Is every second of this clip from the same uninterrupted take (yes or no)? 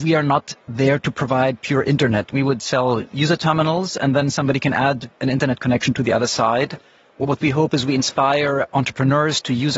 yes